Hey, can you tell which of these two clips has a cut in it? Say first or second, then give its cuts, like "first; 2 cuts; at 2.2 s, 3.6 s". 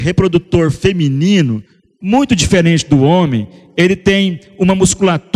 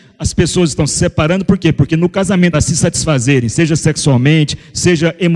second; 1 cut; at 2.5 s